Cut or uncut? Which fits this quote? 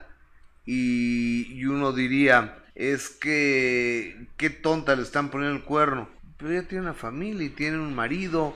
cut